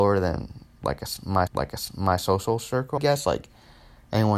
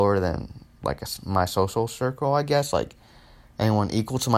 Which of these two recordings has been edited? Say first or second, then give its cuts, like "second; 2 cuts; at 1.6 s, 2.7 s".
first; 2 cuts; at 1.5 s, 3.0 s